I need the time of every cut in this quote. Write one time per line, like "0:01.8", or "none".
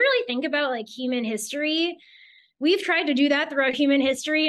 none